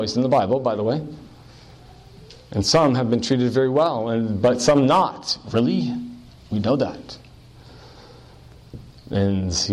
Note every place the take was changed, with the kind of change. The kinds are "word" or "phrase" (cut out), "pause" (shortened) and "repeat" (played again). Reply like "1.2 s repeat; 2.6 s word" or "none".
none